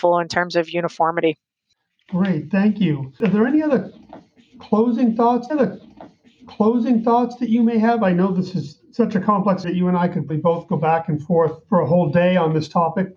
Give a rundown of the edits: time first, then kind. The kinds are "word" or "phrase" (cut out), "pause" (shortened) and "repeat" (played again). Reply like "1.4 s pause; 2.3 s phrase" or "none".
5.5 s repeat; 9.6 s word; 10.3 s word; 11.6 s pause